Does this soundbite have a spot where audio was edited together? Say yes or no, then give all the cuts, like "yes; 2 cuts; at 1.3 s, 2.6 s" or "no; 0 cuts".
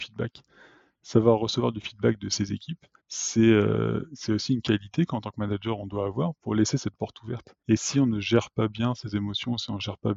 yes; 2 cuts; at 3.0 s, 7.6 s